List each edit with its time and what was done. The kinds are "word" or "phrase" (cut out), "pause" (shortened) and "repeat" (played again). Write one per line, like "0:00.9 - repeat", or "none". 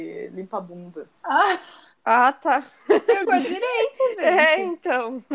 0:01.2 - pause
0:03.2 - word